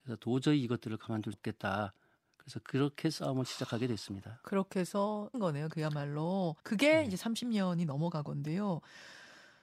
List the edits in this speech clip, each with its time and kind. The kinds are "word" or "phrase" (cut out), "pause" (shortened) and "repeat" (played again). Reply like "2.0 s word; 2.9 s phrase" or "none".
1.3 s word; 5.3 s phrase; 6.6 s pause; 8.3 s word